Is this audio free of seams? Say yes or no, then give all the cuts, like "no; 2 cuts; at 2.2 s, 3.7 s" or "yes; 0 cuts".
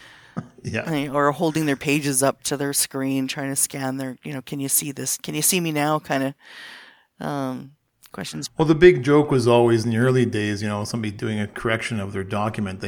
yes; 0 cuts